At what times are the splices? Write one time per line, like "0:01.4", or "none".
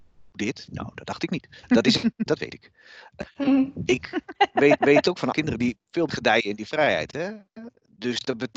0:01.6
0:02.3
0:04.8
0:05.3
0:06.1

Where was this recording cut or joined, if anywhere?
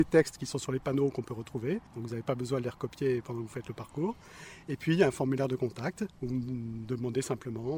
0:01.9
0:06.1

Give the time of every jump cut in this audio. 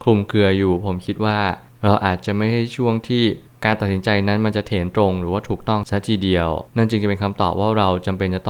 0:06.7

